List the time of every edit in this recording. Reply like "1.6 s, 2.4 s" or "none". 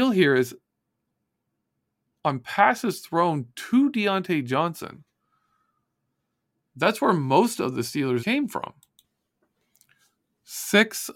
8.2 s